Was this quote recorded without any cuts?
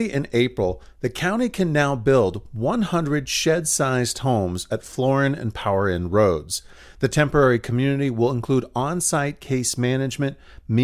yes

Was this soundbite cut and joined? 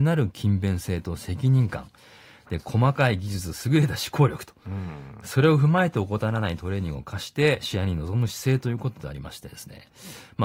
no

